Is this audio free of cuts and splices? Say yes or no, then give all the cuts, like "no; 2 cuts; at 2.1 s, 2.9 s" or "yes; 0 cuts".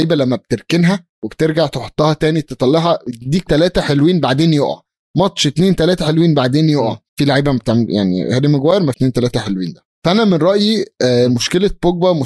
no; 5 cuts; at 1.1 s, 3.5 s, 7.1 s, 8.9 s, 9.9 s